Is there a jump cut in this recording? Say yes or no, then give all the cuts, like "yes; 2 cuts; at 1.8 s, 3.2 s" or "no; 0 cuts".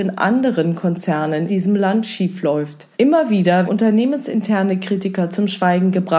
yes; 3 cuts; at 1.5 s, 2.9 s, 3.6 s